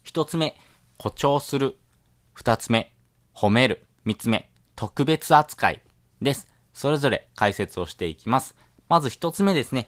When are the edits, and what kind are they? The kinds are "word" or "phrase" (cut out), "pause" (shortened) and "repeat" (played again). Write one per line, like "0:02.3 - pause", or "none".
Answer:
0:03.9 - pause